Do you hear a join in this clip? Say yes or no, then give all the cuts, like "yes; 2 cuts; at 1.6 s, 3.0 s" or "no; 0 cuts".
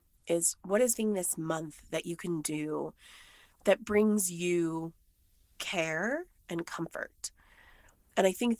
yes; 1 cut; at 0.9 s